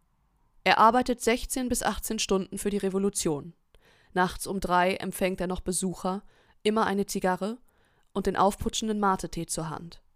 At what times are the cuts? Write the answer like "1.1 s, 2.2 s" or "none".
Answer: none